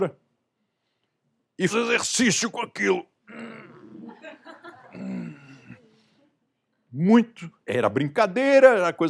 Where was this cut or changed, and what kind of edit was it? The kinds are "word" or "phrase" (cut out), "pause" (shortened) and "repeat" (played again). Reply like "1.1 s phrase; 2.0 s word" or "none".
1.7 s word; 3.2 s pause; 7.6 s pause